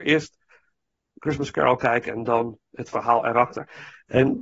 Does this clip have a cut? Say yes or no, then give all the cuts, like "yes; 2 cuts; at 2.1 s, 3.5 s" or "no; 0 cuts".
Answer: no; 0 cuts